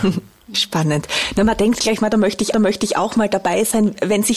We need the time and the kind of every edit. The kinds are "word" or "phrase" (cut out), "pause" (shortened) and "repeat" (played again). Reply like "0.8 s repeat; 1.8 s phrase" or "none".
2.5 s repeat